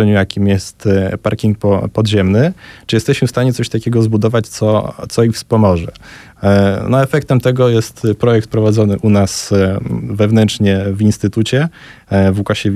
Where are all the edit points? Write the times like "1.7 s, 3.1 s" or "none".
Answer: none